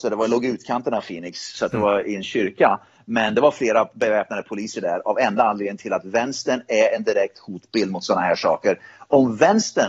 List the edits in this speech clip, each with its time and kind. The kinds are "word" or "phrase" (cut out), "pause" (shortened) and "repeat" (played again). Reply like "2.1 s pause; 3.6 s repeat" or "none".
none

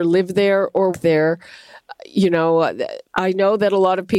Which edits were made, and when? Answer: 0.9 s word; 3.1 s pause

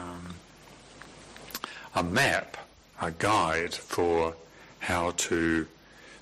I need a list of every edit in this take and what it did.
none

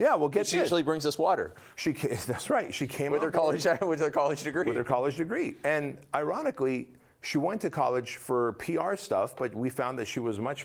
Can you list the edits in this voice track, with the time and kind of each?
none

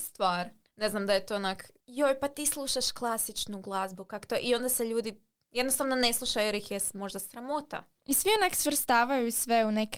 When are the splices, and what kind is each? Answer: none

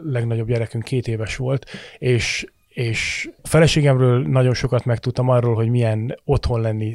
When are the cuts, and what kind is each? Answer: 3.4 s pause

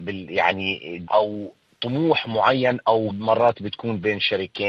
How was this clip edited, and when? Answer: 1.1 s word; 3.1 s word

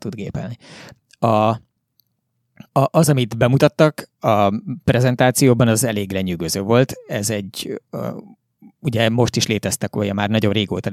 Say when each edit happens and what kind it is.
2.7 s pause

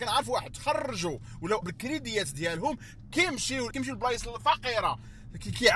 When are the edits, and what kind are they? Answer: 1.6 s word; 3.7 s word

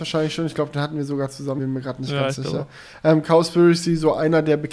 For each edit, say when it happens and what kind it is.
1.6 s word

